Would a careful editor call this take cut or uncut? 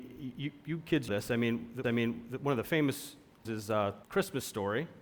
cut